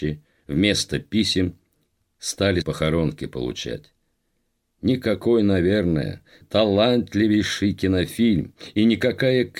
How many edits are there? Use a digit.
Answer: 2